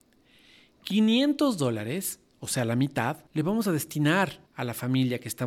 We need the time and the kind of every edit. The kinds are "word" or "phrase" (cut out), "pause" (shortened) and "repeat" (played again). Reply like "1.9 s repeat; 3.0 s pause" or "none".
3.3 s pause; 4.5 s pause